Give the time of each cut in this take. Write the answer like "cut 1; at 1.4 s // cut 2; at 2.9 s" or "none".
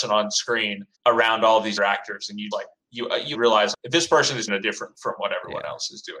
cut 1; at 0.9 s // cut 2; at 1.8 s // cut 3; at 2.5 s // cut 4; at 2.8 s // cut 5; at 3.3 s // cut 6; at 3.7 s // cut 7; at 4.5 s // cut 8; at 4.9 s